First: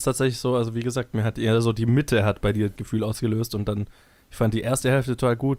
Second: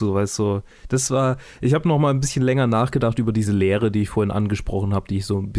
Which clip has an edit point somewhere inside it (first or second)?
first